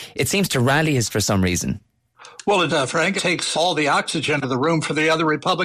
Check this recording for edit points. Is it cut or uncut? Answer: cut